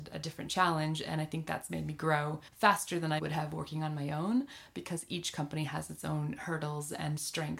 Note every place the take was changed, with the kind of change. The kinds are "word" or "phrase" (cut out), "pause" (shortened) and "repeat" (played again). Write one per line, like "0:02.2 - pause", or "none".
0:02.5 - pause
0:03.2 - word